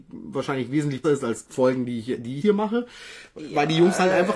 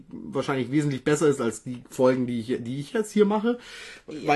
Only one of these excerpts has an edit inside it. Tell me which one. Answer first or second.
first